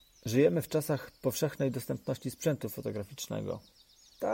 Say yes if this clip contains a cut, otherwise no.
no